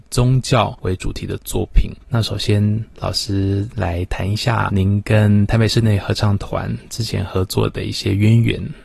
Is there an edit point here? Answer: yes; 1 cut; at 2.0 s

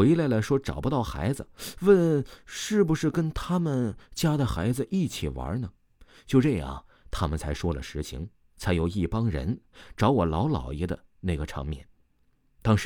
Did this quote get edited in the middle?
no; 0 cuts

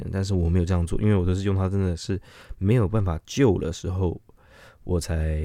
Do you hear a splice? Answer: no; 0 cuts

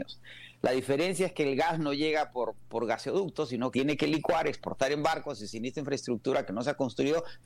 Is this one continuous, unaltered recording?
no; 1 cut; at 3.7 s

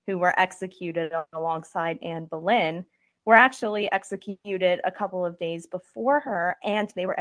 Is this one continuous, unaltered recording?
yes; 0 cuts

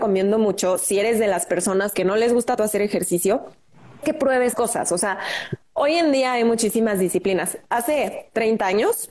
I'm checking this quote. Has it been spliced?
yes; 4 cuts; at 1.9 s, 2.6 s, 4.0 s, 4.5 s

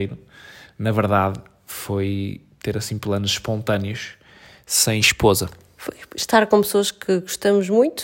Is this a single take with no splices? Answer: yes; 0 cuts

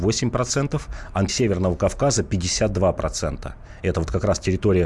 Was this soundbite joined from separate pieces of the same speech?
yes; 1 cut; at 1.3 s

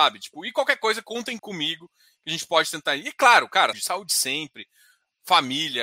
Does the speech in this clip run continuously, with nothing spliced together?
no; 2 cuts; at 1.4 s, 3.7 s

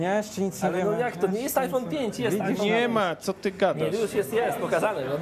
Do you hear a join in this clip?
no; 0 cuts

